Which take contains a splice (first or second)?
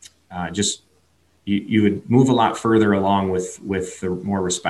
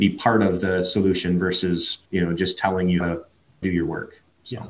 second